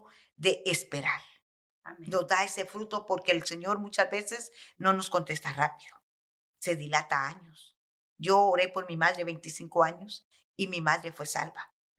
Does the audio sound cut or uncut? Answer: uncut